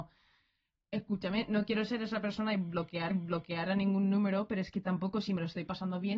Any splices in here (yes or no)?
yes